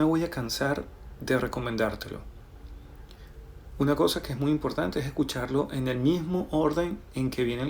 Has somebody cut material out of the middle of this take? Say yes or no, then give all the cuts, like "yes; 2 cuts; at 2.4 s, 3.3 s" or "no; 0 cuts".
no; 0 cuts